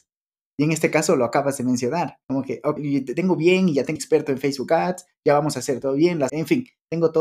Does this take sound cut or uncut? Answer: cut